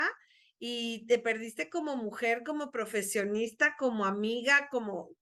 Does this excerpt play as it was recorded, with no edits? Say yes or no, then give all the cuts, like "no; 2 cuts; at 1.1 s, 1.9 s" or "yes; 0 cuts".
yes; 0 cuts